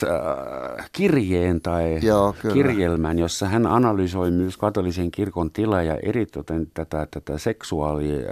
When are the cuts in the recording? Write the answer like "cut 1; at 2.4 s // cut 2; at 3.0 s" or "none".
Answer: none